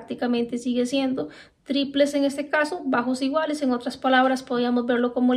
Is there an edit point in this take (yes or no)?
no